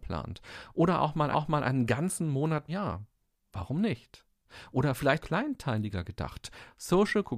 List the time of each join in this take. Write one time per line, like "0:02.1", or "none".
0:01.3
0:02.7
0:05.2